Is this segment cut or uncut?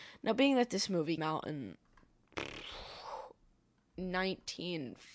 cut